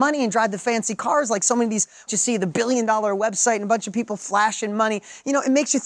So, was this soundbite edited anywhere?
yes; 1 cut; at 2.1 s

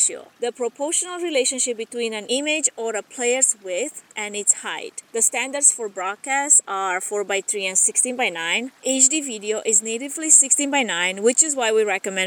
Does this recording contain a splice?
no; 0 cuts

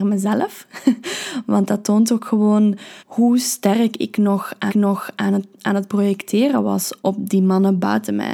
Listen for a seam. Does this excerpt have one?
yes; 3 cuts; at 3.0 s, 4.7 s, 7.0 s

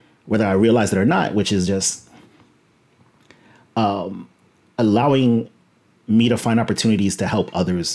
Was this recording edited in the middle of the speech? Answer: no; 0 cuts

